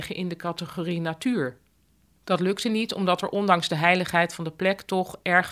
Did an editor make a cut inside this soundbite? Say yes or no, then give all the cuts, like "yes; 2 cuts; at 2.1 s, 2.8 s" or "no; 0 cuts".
no; 0 cuts